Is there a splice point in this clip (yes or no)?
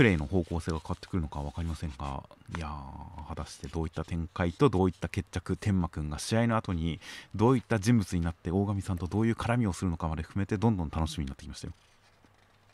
no